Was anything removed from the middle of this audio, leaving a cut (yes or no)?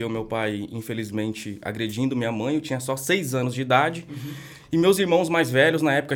no